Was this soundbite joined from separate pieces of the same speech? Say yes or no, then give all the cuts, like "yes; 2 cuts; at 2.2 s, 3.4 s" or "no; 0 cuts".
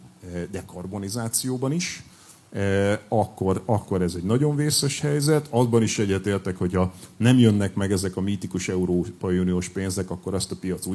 no; 0 cuts